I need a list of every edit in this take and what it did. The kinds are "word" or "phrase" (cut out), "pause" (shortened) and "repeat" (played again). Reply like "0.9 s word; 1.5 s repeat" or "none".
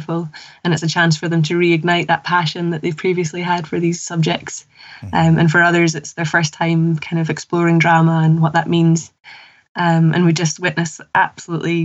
none